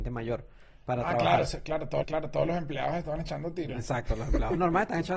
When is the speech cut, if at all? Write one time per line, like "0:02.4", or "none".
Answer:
0:02.0